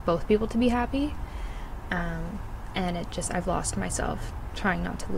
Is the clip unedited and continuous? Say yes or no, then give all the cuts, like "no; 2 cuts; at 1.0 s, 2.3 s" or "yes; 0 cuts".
yes; 0 cuts